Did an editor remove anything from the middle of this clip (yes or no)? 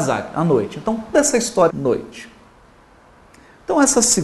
yes